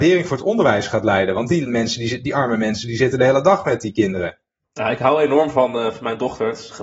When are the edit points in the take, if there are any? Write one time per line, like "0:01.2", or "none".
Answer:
none